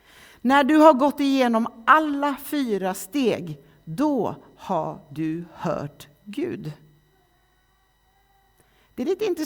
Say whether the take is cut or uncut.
uncut